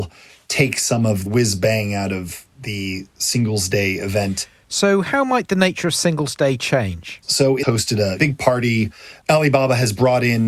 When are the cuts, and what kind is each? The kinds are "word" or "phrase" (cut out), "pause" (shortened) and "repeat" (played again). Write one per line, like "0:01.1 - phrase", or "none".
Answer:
0:01.3 - word
0:07.6 - phrase